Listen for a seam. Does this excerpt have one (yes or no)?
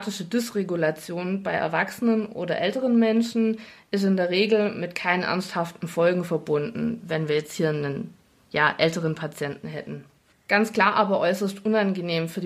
no